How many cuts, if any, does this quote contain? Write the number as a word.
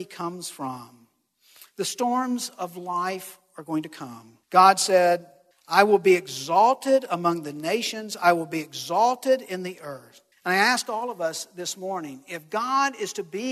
three